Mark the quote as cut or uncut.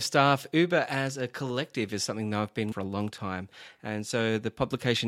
cut